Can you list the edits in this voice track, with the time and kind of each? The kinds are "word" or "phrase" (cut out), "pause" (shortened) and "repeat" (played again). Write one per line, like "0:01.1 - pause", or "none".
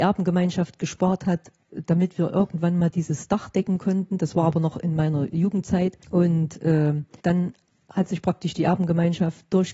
0:06.0 - pause
0:07.2 - pause